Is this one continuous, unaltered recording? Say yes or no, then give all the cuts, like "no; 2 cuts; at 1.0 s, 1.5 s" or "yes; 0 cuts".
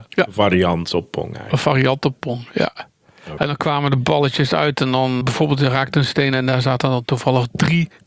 no; 1 cut; at 5.2 s